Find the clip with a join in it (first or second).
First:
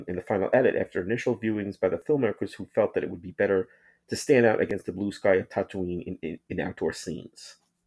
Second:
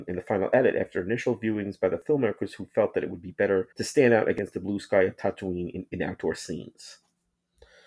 second